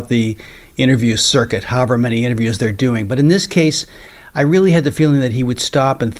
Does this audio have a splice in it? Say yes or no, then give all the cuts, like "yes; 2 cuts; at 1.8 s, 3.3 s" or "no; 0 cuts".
no; 0 cuts